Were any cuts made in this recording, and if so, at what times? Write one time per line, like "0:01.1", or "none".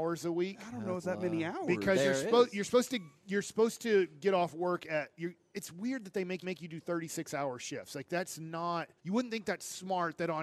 0:01.0
0:06.4
0:09.0